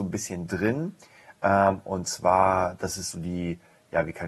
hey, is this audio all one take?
yes; 0 cuts

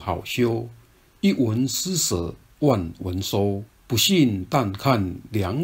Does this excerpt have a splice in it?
yes; 1 cut; at 3.7 s

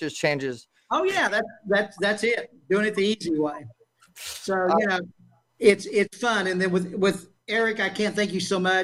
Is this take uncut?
yes; 0 cuts

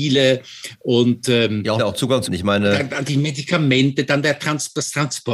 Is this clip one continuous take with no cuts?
no; 3 cuts; at 1.8 s, 2.3 s, 3.0 s

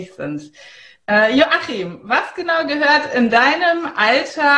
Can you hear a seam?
no; 0 cuts

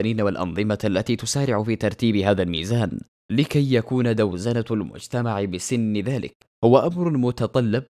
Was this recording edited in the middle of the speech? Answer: yes; 1 cut; at 6.5 s

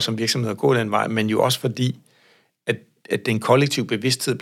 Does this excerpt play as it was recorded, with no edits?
yes; 0 cuts

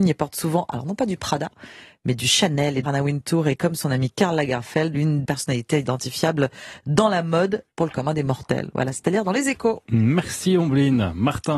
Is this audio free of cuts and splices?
no; 4 cuts; at 2.8 s, 4.9 s, 5.2 s, 7.7 s

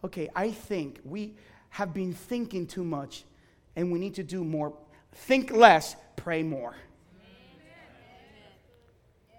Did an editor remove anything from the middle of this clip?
no; 0 cuts

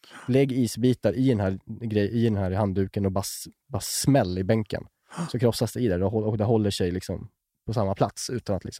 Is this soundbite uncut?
yes; 0 cuts

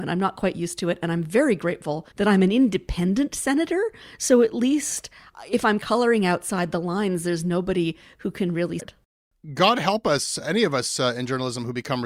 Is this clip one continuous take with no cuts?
no; 2 cuts; at 2.1 s, 8.8 s

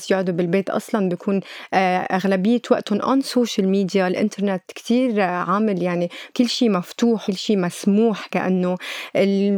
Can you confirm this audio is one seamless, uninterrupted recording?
no; 2 cuts; at 6.3 s, 7.3 s

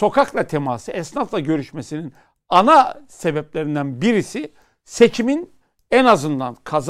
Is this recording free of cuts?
yes; 0 cuts

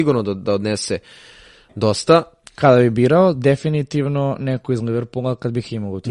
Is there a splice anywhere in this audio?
no; 0 cuts

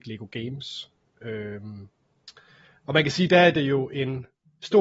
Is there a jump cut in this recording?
no; 0 cuts

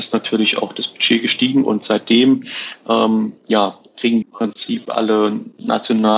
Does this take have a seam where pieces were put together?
yes; 2 cuts; at 3.4 s, 4.2 s

